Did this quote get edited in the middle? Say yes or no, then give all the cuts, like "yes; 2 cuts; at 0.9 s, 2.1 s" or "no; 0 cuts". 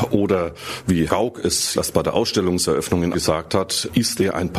yes; 3 cuts; at 1.1 s, 1.7 s, 3.1 s